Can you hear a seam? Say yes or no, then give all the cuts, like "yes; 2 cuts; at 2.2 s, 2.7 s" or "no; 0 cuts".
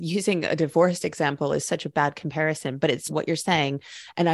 yes; 1 cut; at 3.1 s